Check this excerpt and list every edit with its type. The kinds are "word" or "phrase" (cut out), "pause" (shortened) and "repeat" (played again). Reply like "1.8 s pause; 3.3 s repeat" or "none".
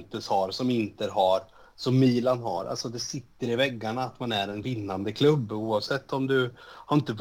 none